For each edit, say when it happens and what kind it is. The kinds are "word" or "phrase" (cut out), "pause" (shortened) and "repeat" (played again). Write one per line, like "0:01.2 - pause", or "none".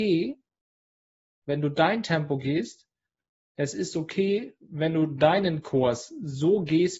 none